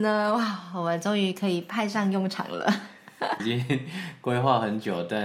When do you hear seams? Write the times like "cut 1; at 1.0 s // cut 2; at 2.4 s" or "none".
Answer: cut 1; at 3.4 s